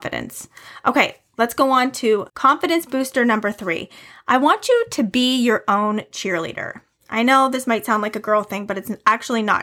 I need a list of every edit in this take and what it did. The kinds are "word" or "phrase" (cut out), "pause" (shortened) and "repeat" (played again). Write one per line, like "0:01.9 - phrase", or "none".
0:02.3 - pause